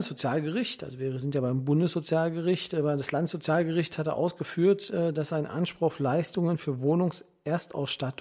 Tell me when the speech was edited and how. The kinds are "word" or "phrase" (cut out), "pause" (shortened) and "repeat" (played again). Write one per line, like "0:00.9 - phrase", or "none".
none